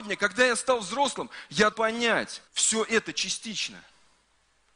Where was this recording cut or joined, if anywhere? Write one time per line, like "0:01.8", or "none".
0:01.7
0:02.5